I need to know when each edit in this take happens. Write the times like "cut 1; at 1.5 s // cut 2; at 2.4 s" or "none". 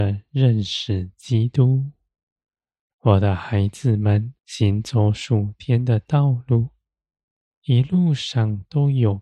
cut 1; at 4.4 s